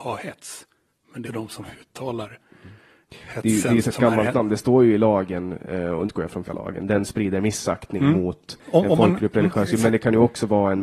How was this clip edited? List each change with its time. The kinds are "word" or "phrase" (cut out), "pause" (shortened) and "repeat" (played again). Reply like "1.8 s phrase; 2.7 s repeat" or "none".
1.2 s word; 3.8 s word; 6.1 s word; 6.4 s word; 7.1 s word; 8.7 s word